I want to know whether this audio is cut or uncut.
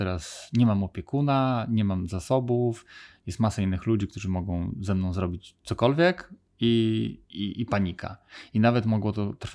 cut